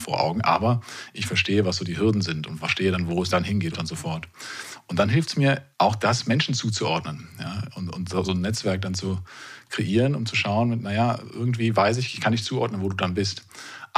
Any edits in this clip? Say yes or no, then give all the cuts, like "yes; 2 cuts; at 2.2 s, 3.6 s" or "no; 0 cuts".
yes; 4 cuts; at 3.3 s, 3.7 s, 5.7 s, 8.2 s